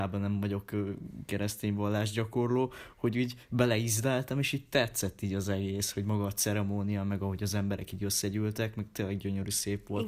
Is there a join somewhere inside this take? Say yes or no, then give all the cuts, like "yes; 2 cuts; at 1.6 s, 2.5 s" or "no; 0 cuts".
no; 0 cuts